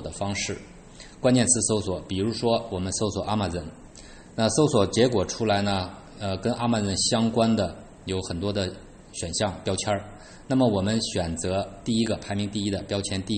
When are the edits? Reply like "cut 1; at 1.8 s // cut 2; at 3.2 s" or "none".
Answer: none

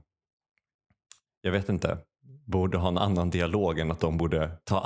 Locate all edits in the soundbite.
none

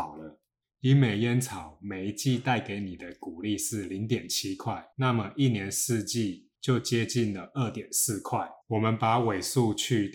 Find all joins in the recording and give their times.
cut 1; at 4.9 s // cut 2; at 6.5 s // cut 3; at 8.6 s

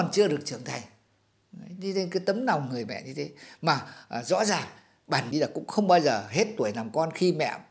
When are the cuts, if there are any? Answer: cut 1; at 5.3 s

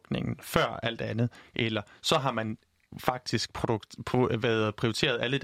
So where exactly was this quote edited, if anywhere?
none

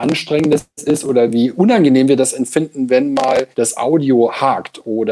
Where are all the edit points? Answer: cut 1; at 3.5 s

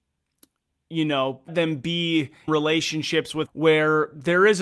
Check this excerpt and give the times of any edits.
cut 1; at 1.5 s // cut 2; at 2.5 s // cut 3; at 3.5 s

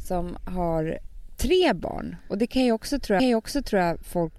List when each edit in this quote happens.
cut 1; at 3.2 s

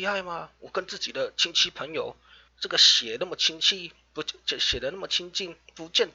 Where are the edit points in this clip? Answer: cut 1; at 2.5 s

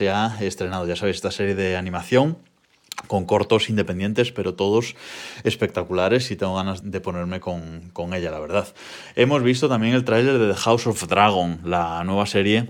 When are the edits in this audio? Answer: cut 1; at 6.8 s

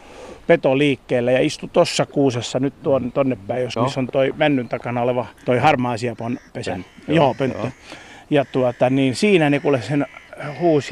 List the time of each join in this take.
cut 1; at 3.8 s // cut 2; at 5.4 s

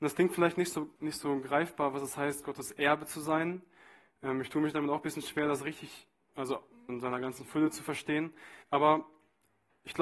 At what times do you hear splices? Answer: cut 1; at 1.0 s // cut 2; at 6.9 s // cut 3; at 8.6 s

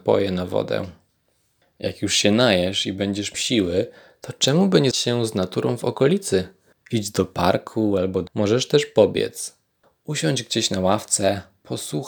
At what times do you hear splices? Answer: cut 1; at 3.3 s // cut 2; at 4.9 s // cut 3; at 8.3 s

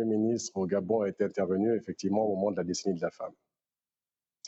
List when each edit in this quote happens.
none

